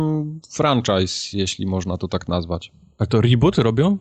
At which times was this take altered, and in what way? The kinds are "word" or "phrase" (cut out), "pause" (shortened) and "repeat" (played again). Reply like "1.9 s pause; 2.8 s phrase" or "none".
none